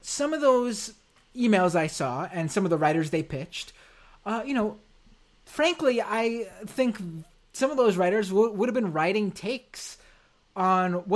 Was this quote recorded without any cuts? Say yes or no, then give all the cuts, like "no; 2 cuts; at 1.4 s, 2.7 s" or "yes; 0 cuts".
yes; 0 cuts